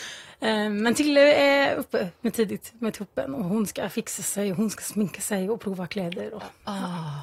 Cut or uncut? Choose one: uncut